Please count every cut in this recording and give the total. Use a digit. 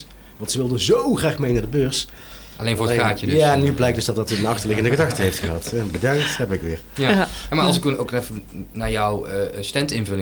0